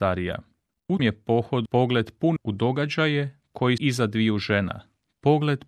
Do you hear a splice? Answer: yes; 4 cuts; at 1.0 s, 1.7 s, 2.4 s, 3.8 s

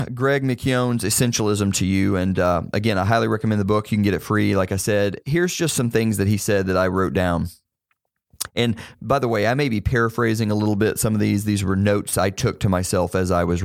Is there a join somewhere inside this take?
no; 0 cuts

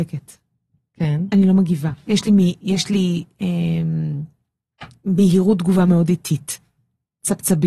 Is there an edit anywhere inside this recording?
no; 0 cuts

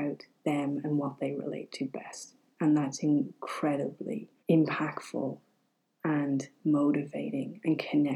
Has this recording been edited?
yes; 1 cut; at 4.4 s

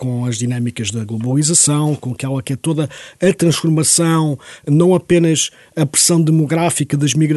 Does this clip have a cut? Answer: no; 0 cuts

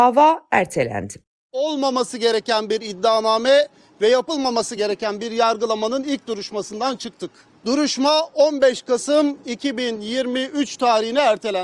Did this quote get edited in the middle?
no; 0 cuts

